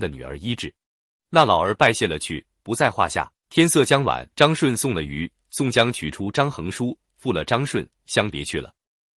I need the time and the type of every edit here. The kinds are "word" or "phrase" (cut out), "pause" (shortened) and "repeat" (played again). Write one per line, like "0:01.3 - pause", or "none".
0:03.4 - pause
0:04.3 - pause